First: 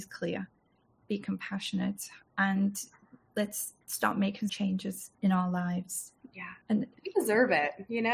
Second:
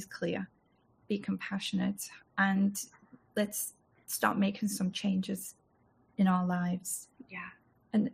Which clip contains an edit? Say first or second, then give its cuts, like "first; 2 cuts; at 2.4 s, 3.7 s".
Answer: first; 4 cuts; at 3.8 s, 4.5 s, 5.1 s, 6.6 s